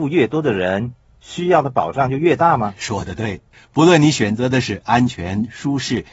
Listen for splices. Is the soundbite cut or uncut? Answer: cut